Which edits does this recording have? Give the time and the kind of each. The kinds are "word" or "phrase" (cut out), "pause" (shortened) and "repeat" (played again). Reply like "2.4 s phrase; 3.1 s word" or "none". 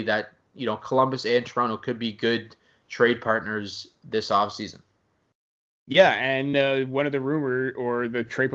none